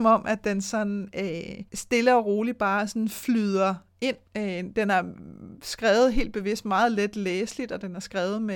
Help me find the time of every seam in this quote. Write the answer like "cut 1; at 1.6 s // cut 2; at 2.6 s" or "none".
cut 1; at 1.7 s // cut 2; at 4.3 s

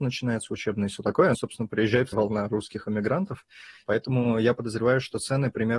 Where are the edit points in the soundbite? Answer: cut 1; at 1.3 s // cut 2; at 2.1 s

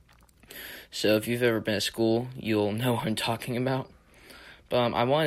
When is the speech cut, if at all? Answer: none

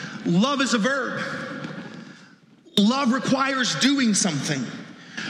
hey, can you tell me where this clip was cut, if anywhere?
none

